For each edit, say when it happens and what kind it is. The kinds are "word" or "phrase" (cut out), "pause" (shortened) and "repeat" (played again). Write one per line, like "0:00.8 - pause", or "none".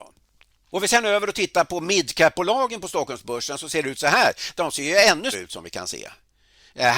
0:05.3 - word